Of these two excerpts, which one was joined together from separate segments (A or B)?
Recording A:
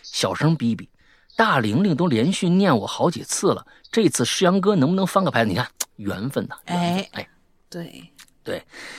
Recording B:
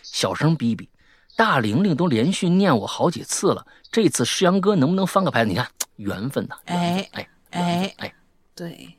B